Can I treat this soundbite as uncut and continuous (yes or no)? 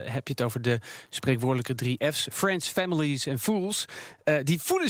yes